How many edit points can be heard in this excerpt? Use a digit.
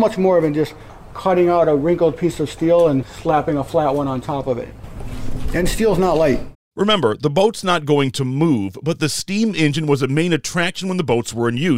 1